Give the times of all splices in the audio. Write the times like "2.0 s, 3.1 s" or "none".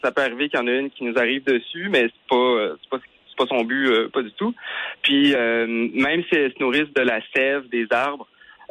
none